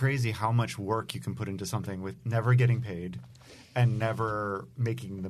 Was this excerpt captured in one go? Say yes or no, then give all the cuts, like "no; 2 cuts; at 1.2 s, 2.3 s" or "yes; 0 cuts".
yes; 0 cuts